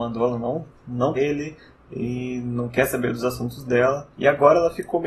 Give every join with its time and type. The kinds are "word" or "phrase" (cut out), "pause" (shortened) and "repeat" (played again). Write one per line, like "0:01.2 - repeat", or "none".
0:01.2 - word
0:04.1 - pause